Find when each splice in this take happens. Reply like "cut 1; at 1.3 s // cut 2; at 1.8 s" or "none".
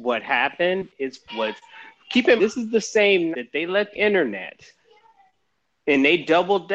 cut 1; at 1.3 s // cut 2; at 2.4 s // cut 3; at 3.3 s // cut 4; at 3.9 s